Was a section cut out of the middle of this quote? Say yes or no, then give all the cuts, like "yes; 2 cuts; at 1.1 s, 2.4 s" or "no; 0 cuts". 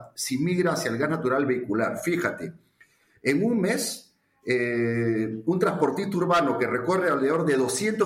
no; 0 cuts